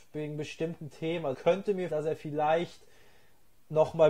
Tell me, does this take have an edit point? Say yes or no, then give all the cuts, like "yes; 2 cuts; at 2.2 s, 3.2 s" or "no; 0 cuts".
yes; 2 cuts; at 1.3 s, 1.9 s